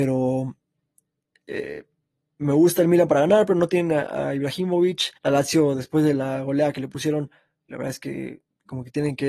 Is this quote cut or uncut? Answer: cut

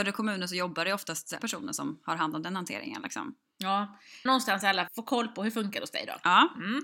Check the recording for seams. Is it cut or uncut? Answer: cut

